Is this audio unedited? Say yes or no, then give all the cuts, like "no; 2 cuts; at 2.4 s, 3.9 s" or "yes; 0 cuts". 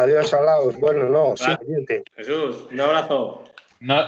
no; 2 cuts; at 1.5 s, 2.1 s